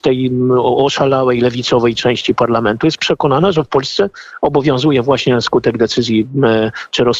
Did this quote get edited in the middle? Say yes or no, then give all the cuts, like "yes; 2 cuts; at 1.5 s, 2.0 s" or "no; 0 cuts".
no; 0 cuts